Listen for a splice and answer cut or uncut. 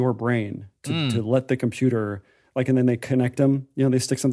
uncut